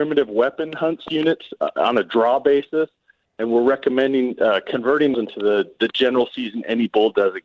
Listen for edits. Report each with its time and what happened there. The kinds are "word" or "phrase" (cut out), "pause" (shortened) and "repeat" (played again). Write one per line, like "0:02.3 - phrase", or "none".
0:05.1 - word